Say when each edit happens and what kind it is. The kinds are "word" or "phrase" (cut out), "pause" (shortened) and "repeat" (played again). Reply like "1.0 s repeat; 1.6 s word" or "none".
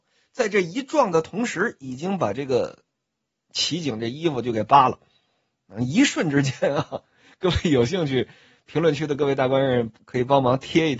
none